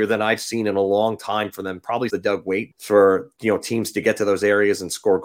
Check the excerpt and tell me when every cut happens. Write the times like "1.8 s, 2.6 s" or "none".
2.1 s, 2.7 s